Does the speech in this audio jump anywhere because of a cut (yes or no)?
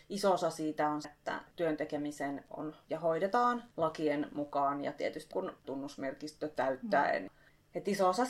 yes